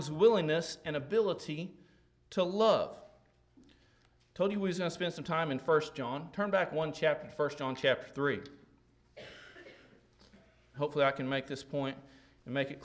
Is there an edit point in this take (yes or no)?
no